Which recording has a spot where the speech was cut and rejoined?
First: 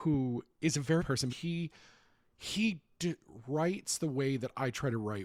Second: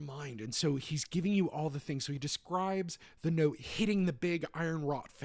first; 2 cuts; at 1.0 s, 1.3 s

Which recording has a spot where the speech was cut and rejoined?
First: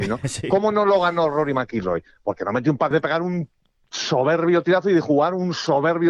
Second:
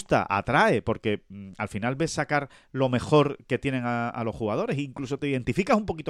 first; 1 cut; at 2.9 s

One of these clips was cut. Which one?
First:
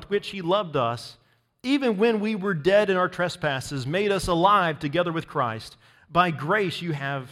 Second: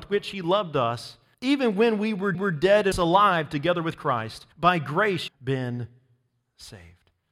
second; 5 cuts; at 1.3 s, 2.3 s, 2.9 s, 4.5 s, 5.3 s

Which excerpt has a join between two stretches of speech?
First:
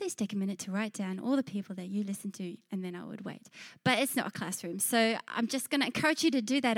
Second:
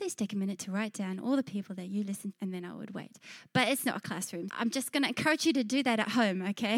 second; 2 cuts; at 2.3 s, 4.5 s

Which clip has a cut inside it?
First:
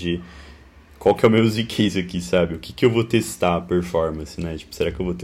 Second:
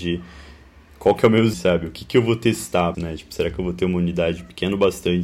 second; 2 cuts; at 1.5 s, 2.9 s

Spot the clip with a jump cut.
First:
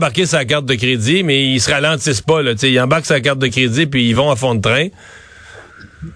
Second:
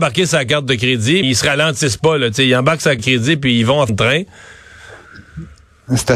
second; 3 cuts; at 1.2 s, 3.0 s, 3.9 s

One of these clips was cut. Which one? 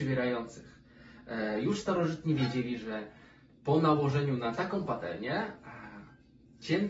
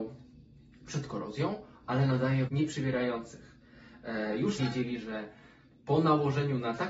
second; 3 cuts; at 1.7 s, 2.5 s, 4.6 s

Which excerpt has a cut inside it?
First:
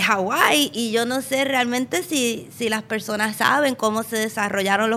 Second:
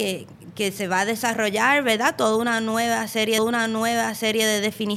second; 1 cut; at 3.4 s

